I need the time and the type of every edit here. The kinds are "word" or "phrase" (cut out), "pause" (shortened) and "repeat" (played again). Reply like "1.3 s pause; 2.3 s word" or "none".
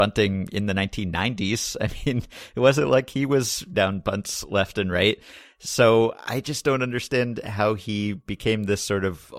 3.7 s word